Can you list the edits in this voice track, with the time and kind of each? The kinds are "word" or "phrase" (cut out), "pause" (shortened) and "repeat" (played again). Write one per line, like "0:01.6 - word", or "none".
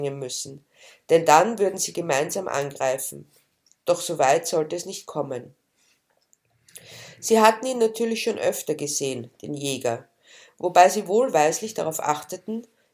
none